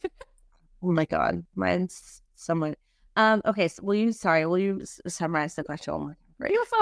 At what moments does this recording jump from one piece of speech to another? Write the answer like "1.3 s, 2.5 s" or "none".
none